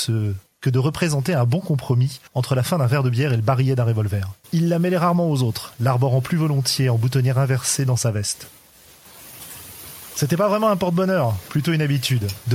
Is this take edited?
yes; 2 cuts; at 2.3 s, 4.4 s

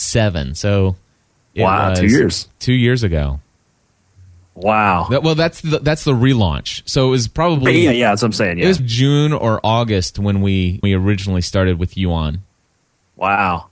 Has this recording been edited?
yes; 2 cuts; at 8.8 s, 10.8 s

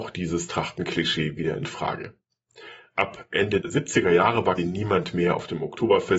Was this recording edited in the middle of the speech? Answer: yes; 2 cuts; at 3.6 s, 4.6 s

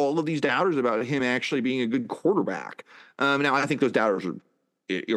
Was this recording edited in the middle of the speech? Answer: no; 0 cuts

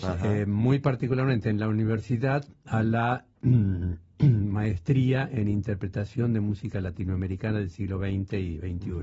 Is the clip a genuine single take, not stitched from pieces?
yes; 0 cuts

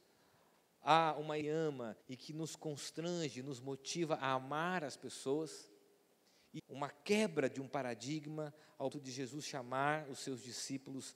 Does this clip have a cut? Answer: yes; 4 cuts; at 1.4 s, 2.0 s, 6.6 s, 8.9 s

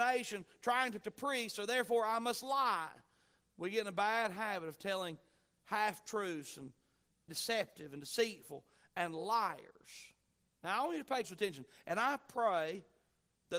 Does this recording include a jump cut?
yes; 3 cuts; at 1.0 s, 7.3 s, 11.2 s

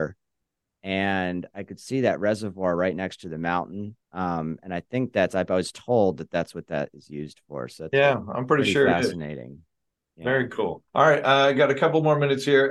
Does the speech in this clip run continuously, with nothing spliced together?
no; 2 cuts; at 4.0 s, 10.9 s

